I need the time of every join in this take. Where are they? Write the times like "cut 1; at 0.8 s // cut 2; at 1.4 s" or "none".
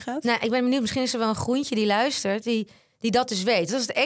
none